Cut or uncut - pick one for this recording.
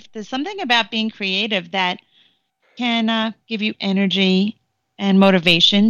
uncut